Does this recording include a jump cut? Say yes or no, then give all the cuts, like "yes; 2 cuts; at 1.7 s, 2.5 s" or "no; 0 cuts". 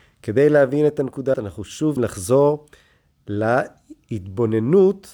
yes; 2 cuts; at 1.3 s, 2.0 s